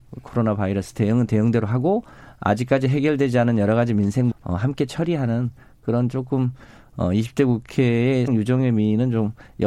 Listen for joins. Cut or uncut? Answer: cut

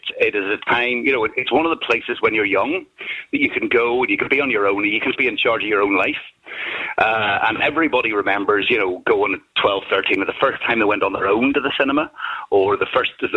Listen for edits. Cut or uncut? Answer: cut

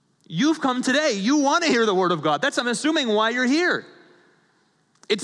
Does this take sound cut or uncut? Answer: uncut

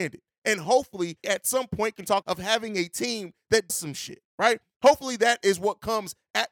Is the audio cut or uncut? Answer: cut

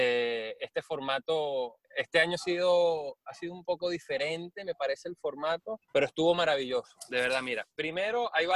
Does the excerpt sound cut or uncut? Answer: cut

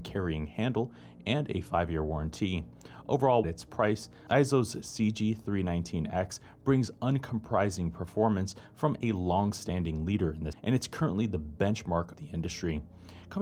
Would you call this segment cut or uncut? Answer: cut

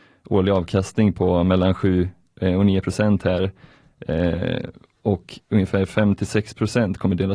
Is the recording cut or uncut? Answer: uncut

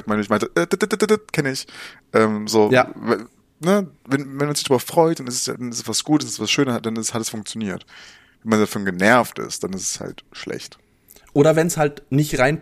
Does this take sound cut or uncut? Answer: uncut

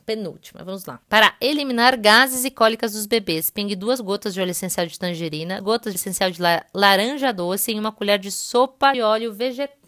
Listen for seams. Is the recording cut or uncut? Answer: cut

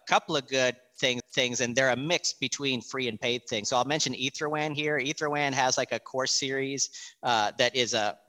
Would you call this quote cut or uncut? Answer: cut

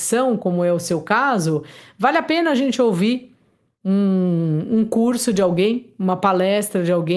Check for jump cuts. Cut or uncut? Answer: uncut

